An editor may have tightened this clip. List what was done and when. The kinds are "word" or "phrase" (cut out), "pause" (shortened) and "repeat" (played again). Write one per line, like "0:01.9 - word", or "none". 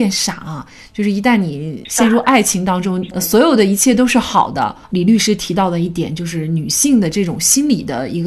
0:03.1 - phrase
0:04.8 - pause